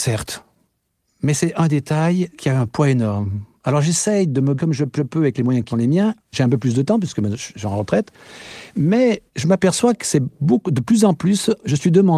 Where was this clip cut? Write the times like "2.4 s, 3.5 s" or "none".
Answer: 2.3 s, 4.6 s, 4.9 s, 5.7 s, 6.2 s, 9.3 s

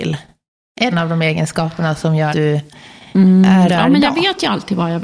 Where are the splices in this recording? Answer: 0.9 s, 2.3 s, 3.7 s

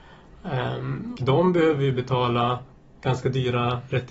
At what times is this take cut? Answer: 1.1 s

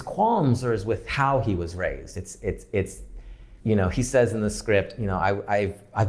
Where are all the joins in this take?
3.6 s

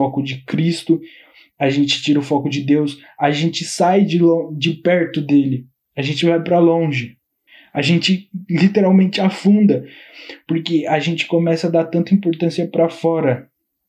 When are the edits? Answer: 7.5 s

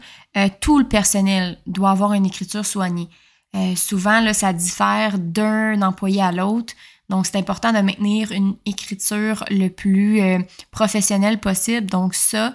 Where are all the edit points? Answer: none

